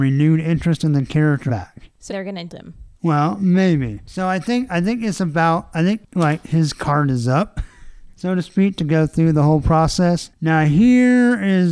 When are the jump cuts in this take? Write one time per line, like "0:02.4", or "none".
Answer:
0:01.5
0:02.1
0:02.5
0:02.9
0:08.1